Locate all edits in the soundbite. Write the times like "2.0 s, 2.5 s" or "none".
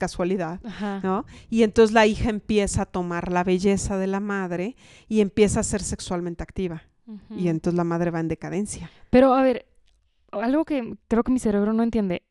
none